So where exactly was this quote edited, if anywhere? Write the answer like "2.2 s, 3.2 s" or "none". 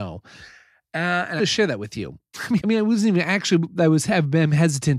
1.4 s, 2.6 s